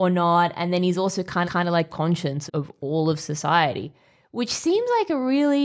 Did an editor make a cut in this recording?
yes; 3 cuts; at 1.4 s, 1.9 s, 2.5 s

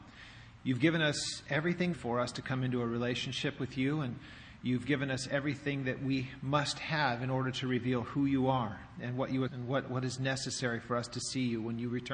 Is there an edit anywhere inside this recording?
yes; 2 cuts; at 1.9 s, 9.5 s

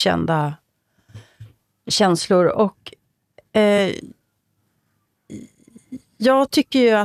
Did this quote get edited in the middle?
no; 0 cuts

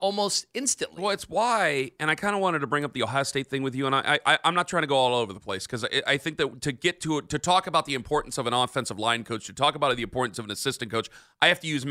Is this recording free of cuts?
yes; 0 cuts

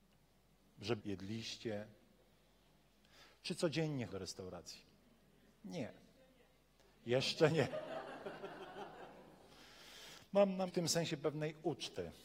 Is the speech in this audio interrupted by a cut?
yes; 3 cuts; at 1.0 s, 4.1 s, 10.7 s

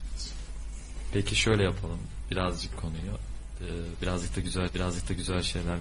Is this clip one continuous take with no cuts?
no; 2 cuts; at 2.8 s, 4.7 s

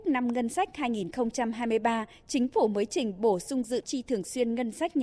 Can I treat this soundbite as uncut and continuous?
no; 1 cut; at 3.8 s

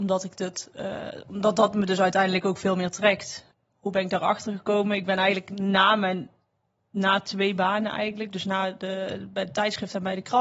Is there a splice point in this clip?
no; 0 cuts

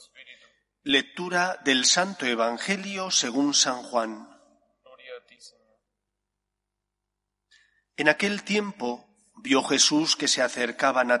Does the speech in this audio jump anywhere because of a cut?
no; 0 cuts

